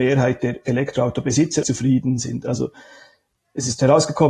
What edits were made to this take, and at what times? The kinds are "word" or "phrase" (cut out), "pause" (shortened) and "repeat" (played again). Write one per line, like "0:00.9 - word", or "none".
0:01.6 - word